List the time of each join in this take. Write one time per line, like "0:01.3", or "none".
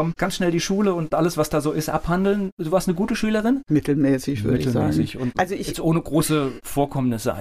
none